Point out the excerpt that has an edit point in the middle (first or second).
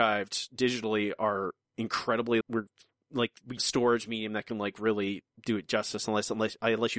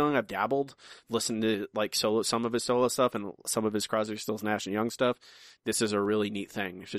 first